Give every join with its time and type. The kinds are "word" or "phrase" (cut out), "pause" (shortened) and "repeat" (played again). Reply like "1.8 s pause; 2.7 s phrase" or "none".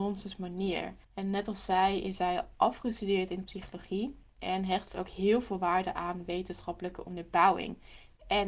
1.0 s pause